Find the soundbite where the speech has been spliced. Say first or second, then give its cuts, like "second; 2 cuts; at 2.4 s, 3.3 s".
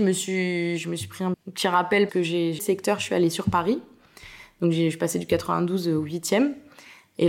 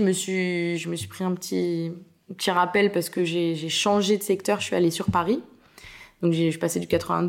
first; 3 cuts; at 1.3 s, 2.1 s, 2.6 s